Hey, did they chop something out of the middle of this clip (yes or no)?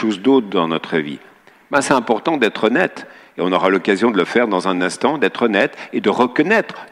no